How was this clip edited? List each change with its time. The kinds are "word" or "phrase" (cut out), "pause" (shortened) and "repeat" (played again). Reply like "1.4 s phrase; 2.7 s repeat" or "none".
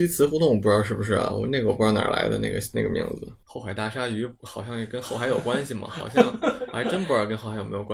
3.4 s pause